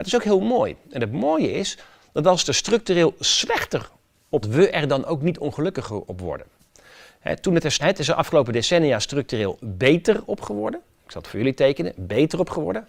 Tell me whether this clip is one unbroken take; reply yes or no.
no